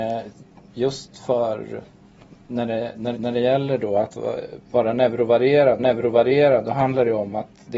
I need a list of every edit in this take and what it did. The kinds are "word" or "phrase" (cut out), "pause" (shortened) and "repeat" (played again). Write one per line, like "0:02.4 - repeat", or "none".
0:02.4 - pause
0:03.1 - repeat
0:05.8 - repeat

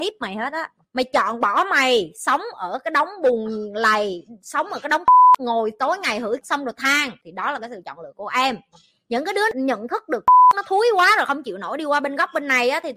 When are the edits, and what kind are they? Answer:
none

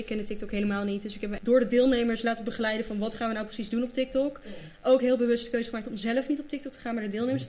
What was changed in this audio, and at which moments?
0:01.4 - word

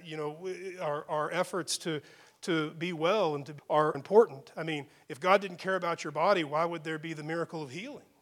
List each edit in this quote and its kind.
0:03.6 - word
0:03.9 - word

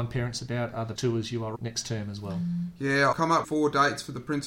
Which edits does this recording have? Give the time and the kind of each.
0:01.0 - word
0:01.5 - word
0:03.1 - word
0:03.4 - word

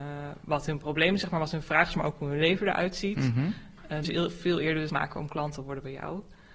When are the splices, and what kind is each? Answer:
0:04.0 - phrase
0:04.9 - word

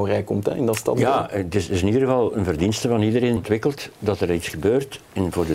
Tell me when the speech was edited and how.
0:03.4 - word

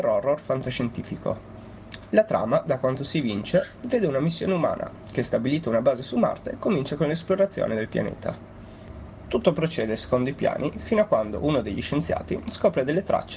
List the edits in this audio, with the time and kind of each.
none

